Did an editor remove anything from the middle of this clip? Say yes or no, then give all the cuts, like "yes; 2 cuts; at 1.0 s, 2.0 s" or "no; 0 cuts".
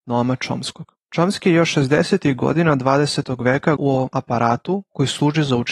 yes; 3 cuts; at 1.0 s, 3.8 s, 4.1 s